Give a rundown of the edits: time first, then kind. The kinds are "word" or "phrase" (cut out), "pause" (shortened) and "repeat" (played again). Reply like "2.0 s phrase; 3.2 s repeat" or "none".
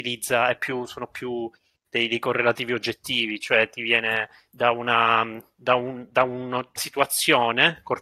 6.8 s word